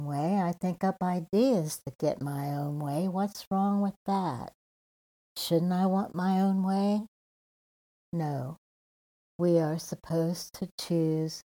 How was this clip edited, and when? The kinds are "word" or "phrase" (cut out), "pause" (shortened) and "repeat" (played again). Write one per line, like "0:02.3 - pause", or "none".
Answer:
none